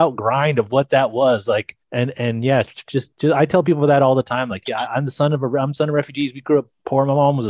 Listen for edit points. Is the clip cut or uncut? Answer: cut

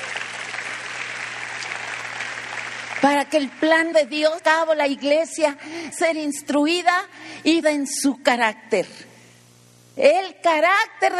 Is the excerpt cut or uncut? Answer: cut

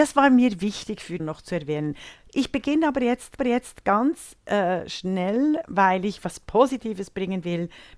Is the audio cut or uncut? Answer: cut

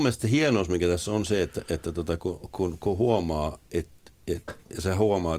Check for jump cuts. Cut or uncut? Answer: uncut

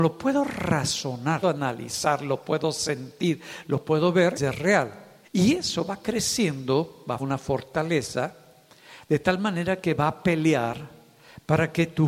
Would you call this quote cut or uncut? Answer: cut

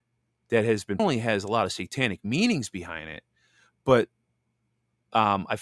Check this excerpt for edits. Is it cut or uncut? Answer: cut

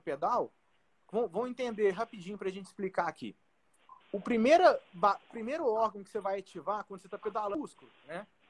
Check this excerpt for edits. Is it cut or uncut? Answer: cut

